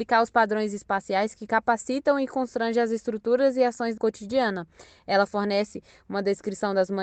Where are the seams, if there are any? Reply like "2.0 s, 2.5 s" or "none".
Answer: 4.0 s